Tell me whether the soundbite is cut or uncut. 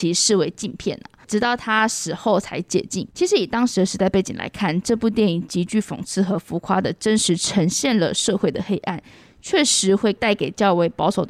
cut